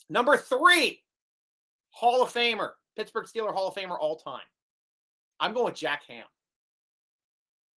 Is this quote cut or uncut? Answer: uncut